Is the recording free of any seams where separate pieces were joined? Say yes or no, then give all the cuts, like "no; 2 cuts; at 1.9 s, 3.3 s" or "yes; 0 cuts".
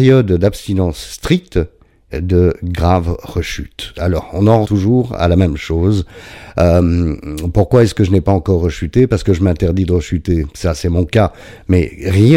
no; 2 cuts; at 2.1 s, 4.6 s